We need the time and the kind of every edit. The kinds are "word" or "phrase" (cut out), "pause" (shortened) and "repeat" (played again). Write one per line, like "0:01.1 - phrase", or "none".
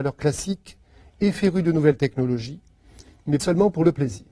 0:03.4 - word